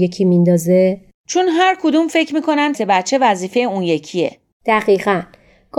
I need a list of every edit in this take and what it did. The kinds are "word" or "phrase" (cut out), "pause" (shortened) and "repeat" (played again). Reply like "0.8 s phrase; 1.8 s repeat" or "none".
2.7 s word